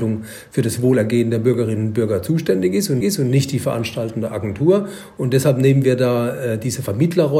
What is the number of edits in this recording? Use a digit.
1